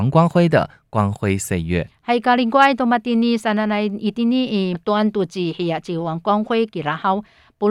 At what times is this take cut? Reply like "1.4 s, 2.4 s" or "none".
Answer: 4.7 s